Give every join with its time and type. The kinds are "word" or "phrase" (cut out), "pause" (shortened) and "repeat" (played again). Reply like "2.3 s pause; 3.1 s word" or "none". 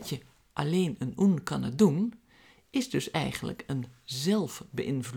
none